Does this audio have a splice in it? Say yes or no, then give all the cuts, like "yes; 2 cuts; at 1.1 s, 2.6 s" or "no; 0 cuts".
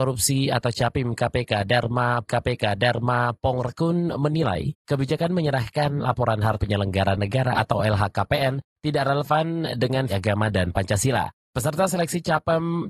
yes; 4 cuts; at 2.3 s, 6.6 s, 7.5 s, 10.1 s